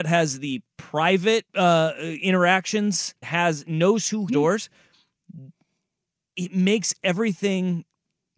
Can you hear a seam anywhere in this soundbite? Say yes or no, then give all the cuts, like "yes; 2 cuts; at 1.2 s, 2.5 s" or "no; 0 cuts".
yes; 3 cuts; at 1.5 s, 3.2 s, 4.3 s